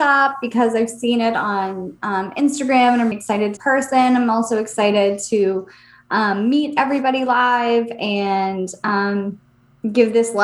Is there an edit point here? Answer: yes; 2 cuts; at 3.1 s, 3.6 s

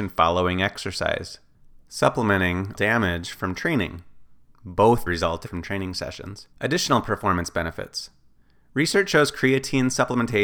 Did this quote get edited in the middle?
yes; 4 cuts; at 2.8 s, 5.1 s, 5.5 s, 6.5 s

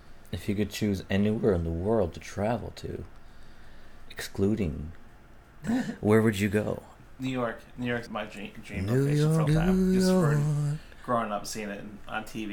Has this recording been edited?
yes; 3 cuts; at 5.6 s, 8.1 s, 9.5 s

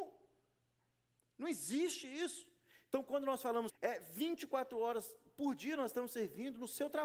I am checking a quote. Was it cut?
yes; 1 cut; at 3.7 s

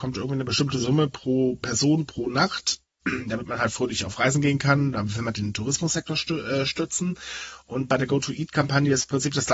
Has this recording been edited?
no; 0 cuts

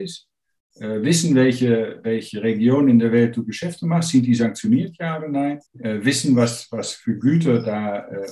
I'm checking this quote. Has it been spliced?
yes; 1 cut; at 5.7 s

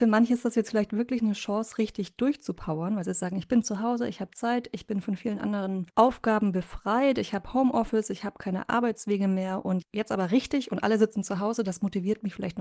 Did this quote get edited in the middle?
yes; 2 cuts; at 5.9 s, 9.8 s

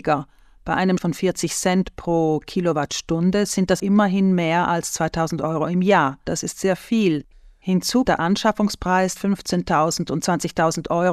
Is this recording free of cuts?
no; 4 cuts; at 1.0 s, 3.8 s, 8.0 s, 9.2 s

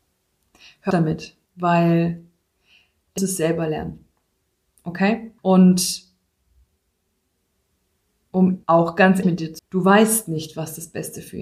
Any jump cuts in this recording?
yes; 7 cuts; at 0.9 s, 1.4 s, 3.2 s, 5.4 s, 8.6 s, 9.2 s, 9.6 s

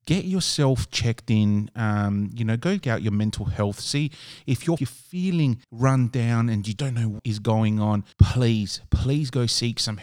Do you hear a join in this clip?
yes; 6 cuts; at 2.8 s, 4.8 s, 5.6 s, 6.8 s, 7.2 s, 8.1 s

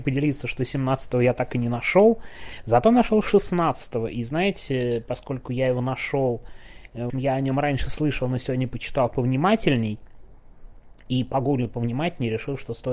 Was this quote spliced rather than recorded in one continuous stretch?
yes; 1 cut; at 7.1 s

